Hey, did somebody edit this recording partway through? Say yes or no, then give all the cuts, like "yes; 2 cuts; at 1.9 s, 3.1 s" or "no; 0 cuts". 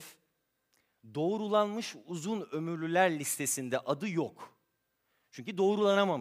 no; 0 cuts